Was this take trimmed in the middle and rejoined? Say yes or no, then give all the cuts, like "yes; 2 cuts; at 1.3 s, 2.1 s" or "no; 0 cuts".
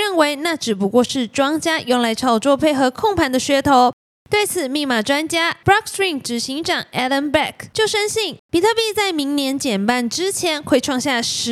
no; 0 cuts